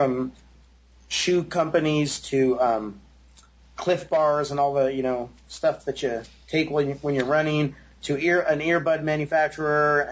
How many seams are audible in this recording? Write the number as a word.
zero